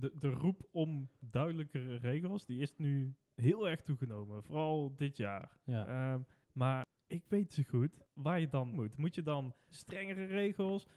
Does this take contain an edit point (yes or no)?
yes